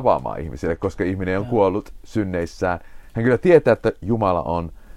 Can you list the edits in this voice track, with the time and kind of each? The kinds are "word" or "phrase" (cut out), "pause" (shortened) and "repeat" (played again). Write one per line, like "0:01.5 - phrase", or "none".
none

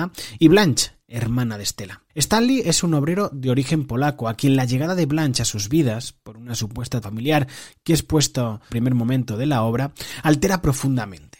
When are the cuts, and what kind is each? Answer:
0:02.1 - pause
0:07.0 - word
0:08.7 - phrase

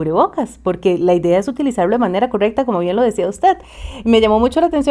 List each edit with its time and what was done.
none

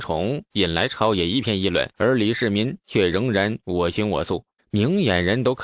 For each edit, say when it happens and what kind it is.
0:01.9 - pause
0:04.6 - pause

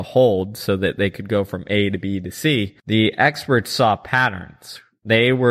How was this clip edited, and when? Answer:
0:02.8 - pause

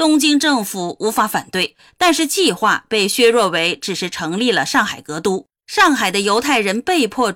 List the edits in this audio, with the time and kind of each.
0:05.5 - pause

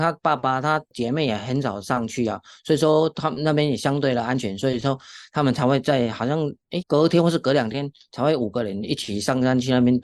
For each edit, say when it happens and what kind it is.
0:06.8 - word

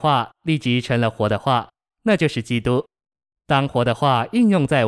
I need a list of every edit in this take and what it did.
none

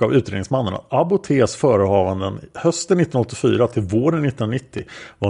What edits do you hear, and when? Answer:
none

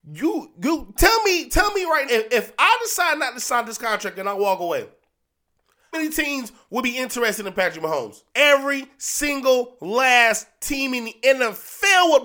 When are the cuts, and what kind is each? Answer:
0:01.0 - word
0:02.1 - word
0:05.9 - word
0:08.3 - pause

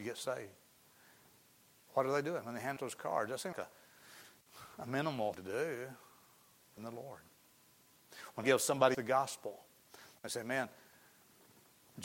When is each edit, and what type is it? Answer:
0:02.8 - word
0:03.5 - word
0:05.3 - word
0:06.8 - word
0:08.4 - word
0:08.9 - word

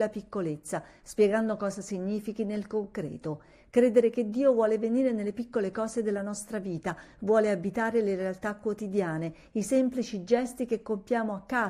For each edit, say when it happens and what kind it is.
none

